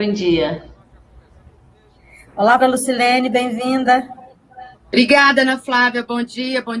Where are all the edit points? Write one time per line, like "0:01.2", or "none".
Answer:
0:02.6
0:04.7